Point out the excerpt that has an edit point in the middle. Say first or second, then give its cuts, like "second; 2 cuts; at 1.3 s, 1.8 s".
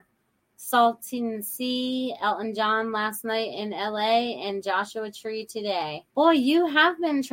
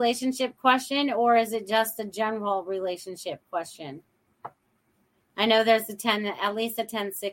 first; 1 cut; at 6.1 s